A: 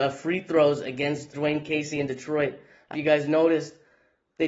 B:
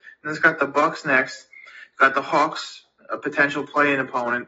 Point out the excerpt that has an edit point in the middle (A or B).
A